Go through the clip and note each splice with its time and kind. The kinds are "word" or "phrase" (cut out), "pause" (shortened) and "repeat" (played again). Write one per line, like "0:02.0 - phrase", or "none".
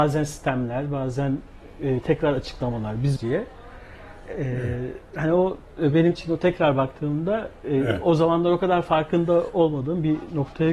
0:03.2 - phrase
0:05.7 - pause